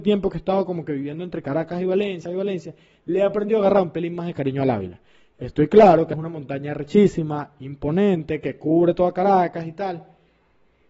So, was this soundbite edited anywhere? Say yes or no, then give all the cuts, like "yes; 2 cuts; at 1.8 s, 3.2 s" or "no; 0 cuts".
yes; 2 cuts; at 2.3 s, 6.1 s